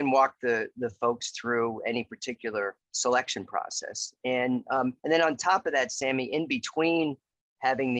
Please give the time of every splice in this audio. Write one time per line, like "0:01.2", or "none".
0:02.8
0:05.0